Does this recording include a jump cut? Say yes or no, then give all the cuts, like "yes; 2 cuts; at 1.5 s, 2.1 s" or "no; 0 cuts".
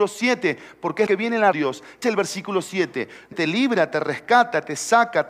yes; 4 cuts; at 1.1 s, 1.5 s, 2.0 s, 3.3 s